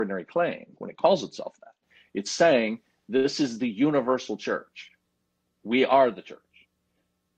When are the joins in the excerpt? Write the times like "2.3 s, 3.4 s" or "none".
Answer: none